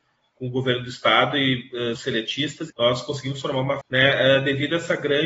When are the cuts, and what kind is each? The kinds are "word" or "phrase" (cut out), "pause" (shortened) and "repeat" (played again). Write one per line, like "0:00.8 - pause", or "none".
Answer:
0:01.9 - word
0:02.7 - word
0:03.8 - word